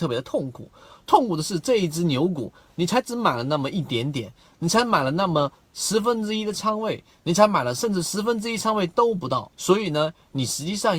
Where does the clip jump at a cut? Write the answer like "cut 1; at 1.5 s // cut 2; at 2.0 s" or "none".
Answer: cut 1; at 9.5 s